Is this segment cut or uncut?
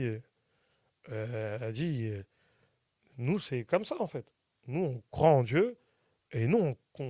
uncut